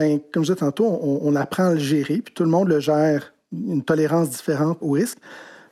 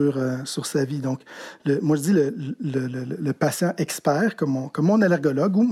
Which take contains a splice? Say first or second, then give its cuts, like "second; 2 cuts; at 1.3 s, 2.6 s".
first; 1 cut; at 4.8 s